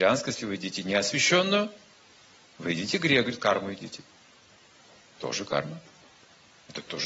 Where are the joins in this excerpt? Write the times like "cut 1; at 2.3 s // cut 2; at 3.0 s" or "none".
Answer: none

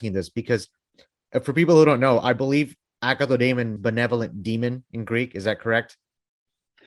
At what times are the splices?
cut 1; at 3.8 s

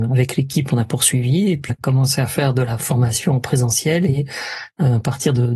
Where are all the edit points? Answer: cut 1; at 1.7 s // cut 2; at 2.8 s

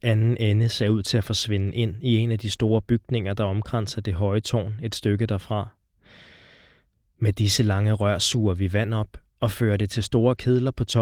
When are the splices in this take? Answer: none

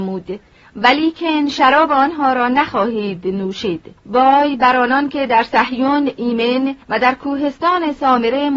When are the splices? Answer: cut 1; at 4.0 s // cut 2; at 6.8 s

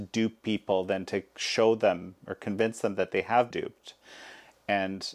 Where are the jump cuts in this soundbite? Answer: cut 1; at 3.5 s

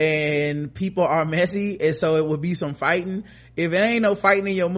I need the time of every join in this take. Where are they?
none

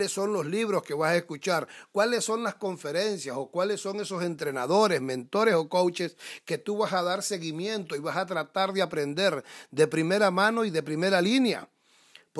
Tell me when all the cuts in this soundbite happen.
none

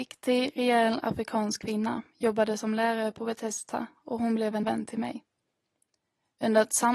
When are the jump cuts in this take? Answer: cut 1; at 4.6 s

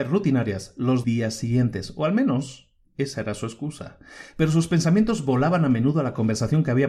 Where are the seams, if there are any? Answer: cut 1; at 1.0 s

